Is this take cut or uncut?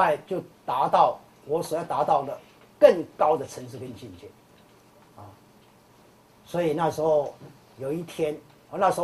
uncut